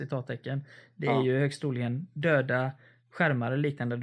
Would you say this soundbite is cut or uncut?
uncut